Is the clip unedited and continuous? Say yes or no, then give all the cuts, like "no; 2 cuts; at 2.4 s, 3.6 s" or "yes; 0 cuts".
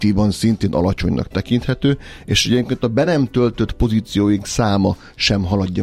yes; 0 cuts